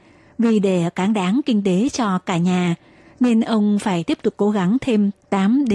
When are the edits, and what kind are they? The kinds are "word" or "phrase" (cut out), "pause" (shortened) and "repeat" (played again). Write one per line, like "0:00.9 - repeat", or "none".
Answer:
none